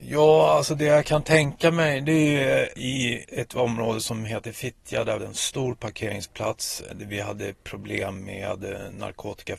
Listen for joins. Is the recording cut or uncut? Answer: cut